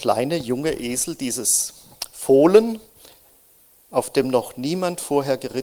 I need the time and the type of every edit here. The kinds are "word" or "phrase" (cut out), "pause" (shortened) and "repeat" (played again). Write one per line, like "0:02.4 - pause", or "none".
none